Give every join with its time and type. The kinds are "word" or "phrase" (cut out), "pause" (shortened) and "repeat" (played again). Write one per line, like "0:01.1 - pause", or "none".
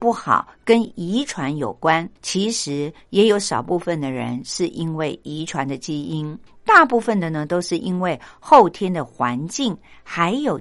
0:02.2 - pause
0:06.5 - pause